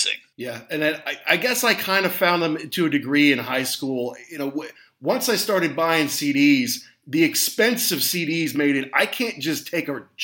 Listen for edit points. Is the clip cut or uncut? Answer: uncut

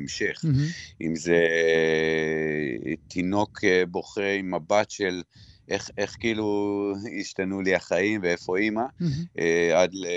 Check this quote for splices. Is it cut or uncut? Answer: uncut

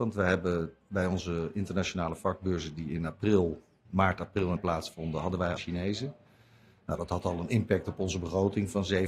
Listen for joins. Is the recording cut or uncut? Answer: cut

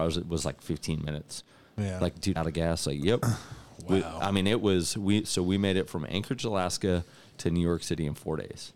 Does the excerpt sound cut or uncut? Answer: cut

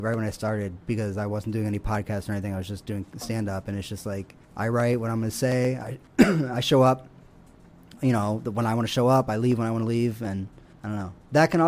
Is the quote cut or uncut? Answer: cut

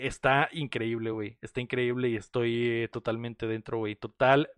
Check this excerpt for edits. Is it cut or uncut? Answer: uncut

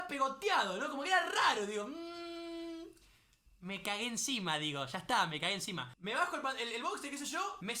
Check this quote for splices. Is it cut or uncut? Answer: uncut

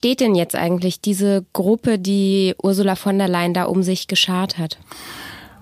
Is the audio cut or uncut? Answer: uncut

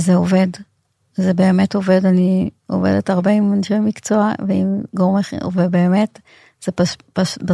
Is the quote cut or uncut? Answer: uncut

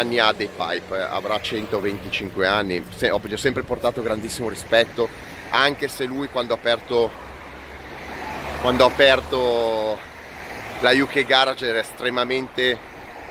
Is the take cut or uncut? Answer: uncut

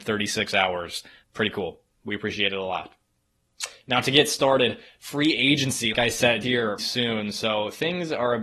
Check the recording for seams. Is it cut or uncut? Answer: cut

